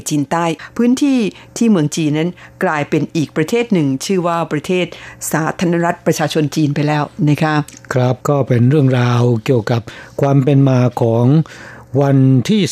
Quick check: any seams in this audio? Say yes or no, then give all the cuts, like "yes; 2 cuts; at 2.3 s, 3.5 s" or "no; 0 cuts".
yes; 1 cut; at 8.2 s